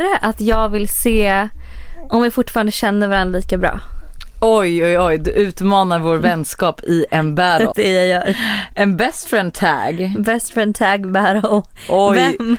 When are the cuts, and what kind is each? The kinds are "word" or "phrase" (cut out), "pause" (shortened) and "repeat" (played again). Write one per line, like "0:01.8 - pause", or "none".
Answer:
0:07.7 - word